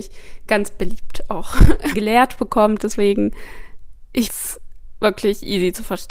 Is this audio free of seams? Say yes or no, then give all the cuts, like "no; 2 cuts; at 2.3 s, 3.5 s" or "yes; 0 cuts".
no; 2 cuts; at 1.9 s, 4.3 s